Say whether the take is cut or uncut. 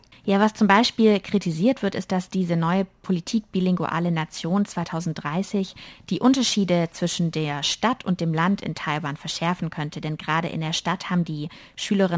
uncut